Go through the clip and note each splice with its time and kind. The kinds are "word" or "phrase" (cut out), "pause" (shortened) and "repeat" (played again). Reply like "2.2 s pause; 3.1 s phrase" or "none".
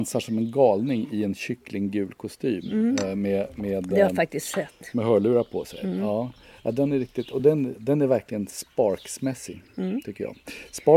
none